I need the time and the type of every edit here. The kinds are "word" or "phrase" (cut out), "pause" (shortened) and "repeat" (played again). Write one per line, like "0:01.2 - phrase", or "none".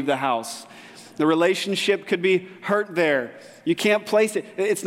none

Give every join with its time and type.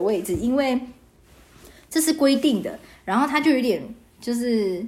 none

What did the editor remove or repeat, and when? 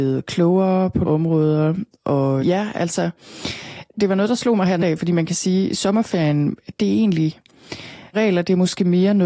0:01.0 - word
0:02.4 - word
0:04.8 - word
0:08.1 - word

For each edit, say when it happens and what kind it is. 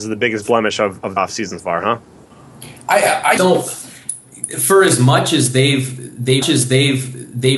0:01.2 - word
0:01.6 - word
0:03.4 - phrase
0:06.4 - repeat

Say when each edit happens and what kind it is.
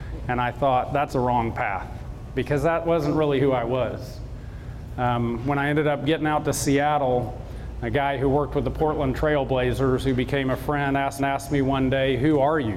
0:01.1 - word
0:11.2 - repeat

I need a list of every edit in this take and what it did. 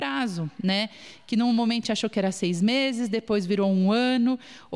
0:01.8 - word

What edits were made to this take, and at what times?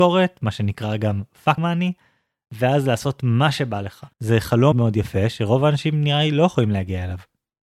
0:01.6 - word
0:04.1 - pause
0:04.7 - word

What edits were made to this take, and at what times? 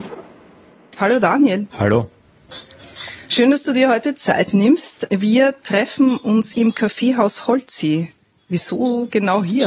0:01.7 - pause
0:06.5 - word

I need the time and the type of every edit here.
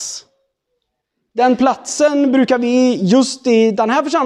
none

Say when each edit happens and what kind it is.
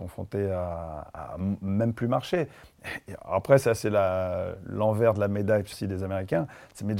0:05.7 - word

